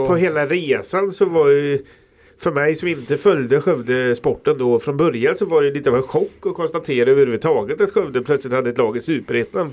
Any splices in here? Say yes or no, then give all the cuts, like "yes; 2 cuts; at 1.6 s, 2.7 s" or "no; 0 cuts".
no; 0 cuts